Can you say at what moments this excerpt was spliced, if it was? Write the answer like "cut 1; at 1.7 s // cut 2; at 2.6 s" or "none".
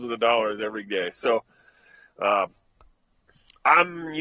none